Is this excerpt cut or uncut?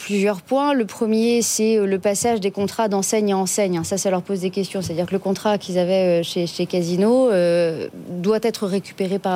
uncut